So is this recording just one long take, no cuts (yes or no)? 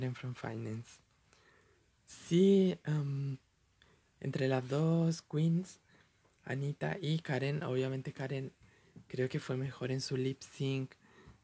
yes